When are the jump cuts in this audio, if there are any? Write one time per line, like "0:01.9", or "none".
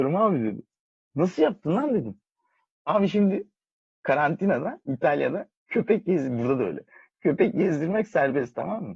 none